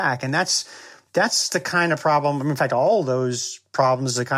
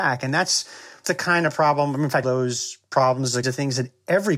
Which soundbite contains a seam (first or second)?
second